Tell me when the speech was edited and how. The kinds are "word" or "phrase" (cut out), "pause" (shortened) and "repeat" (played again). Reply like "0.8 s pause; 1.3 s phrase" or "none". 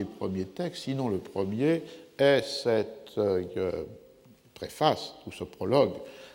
none